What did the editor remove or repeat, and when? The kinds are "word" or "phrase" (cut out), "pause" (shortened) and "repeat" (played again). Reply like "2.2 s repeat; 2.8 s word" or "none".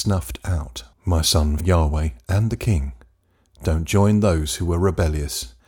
0.9 s pause; 1.6 s word